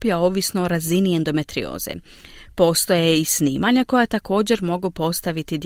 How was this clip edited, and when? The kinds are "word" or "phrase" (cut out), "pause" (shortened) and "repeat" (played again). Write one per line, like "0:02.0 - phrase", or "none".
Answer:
none